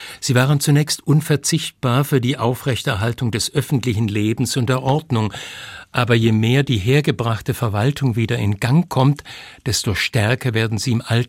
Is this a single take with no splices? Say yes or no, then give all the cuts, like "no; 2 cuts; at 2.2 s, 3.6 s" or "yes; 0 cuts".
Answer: yes; 0 cuts